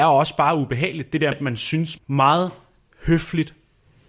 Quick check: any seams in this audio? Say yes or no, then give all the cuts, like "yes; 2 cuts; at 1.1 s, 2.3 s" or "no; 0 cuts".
yes; 2 cuts; at 1.3 s, 2.0 s